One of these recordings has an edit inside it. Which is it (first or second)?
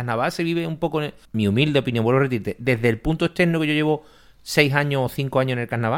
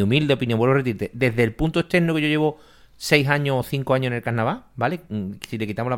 first